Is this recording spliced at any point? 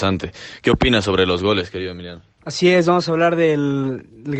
no; 0 cuts

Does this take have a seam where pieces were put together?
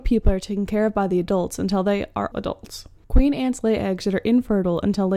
yes; 1 cut; at 2.3 s

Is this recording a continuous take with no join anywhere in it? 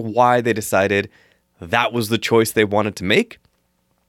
yes; 0 cuts

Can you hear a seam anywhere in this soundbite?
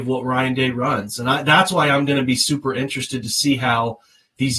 no; 0 cuts

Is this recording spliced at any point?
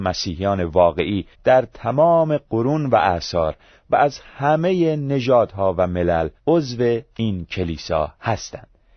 yes; 2 cuts; at 1.3 s, 6.4 s

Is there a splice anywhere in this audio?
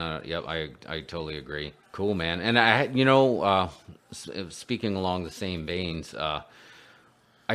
yes; 1 cut; at 1.8 s

